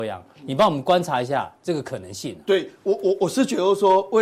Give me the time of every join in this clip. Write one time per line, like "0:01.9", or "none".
none